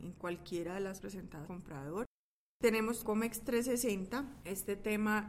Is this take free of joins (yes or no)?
no